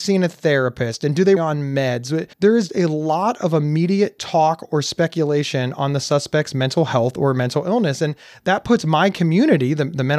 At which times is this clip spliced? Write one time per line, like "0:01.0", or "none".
0:01.4
0:02.3
0:02.7